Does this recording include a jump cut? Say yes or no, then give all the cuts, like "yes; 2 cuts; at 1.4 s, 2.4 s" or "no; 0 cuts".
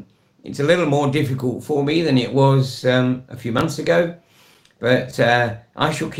no; 0 cuts